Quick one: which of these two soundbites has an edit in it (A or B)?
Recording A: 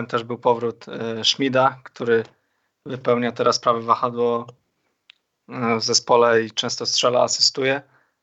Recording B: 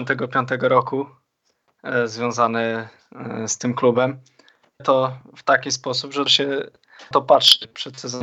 B